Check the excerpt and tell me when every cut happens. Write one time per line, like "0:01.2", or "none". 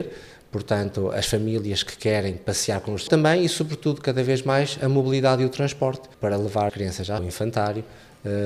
0:03.1
0:06.1
0:06.7
0:07.2